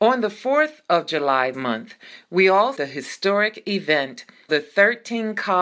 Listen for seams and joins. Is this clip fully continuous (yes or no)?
no